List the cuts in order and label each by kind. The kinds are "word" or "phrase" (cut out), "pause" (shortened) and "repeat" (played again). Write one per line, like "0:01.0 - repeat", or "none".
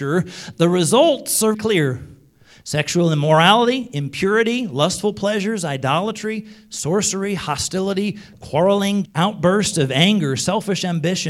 0:01.5 - word
0:09.0 - word